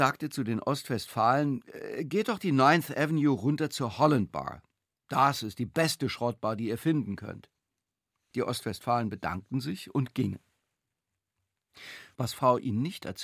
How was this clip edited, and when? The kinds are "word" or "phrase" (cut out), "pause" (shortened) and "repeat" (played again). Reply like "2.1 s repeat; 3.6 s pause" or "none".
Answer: none